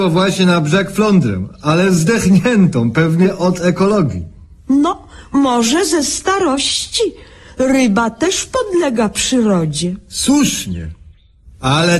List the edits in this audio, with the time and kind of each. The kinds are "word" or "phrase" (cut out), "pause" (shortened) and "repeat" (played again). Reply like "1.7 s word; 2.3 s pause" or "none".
none